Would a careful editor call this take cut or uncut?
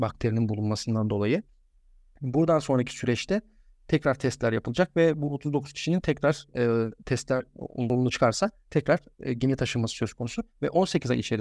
uncut